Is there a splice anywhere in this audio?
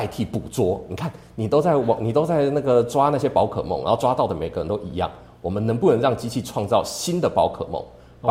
no; 0 cuts

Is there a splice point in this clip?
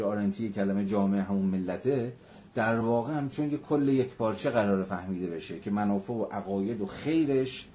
no; 0 cuts

